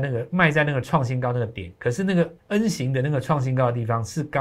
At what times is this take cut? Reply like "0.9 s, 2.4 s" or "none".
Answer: 2.4 s